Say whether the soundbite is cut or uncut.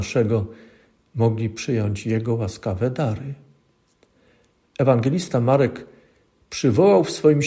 uncut